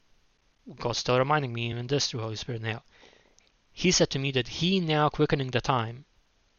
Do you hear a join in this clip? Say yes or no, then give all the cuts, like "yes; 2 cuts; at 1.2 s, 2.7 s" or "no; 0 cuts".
no; 0 cuts